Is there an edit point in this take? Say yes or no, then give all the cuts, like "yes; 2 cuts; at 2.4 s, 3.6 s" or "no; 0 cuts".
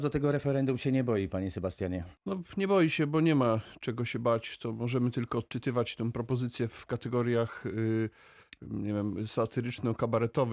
yes; 1 cut; at 2.2 s